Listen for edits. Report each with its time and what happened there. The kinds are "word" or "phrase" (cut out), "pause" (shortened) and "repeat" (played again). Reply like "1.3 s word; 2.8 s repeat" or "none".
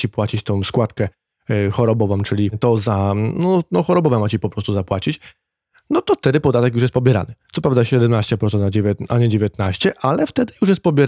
none